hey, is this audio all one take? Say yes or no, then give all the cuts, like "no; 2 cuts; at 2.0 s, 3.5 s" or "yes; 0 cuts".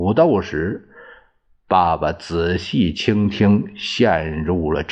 yes; 0 cuts